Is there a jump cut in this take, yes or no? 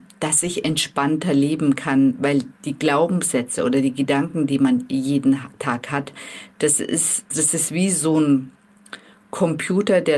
yes